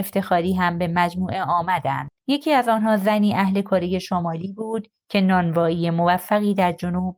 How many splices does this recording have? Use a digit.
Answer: 1